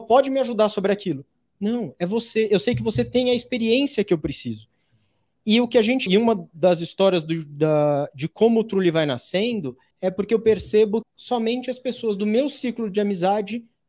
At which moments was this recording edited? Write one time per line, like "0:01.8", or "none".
0:06.1
0:09.9
0:11.0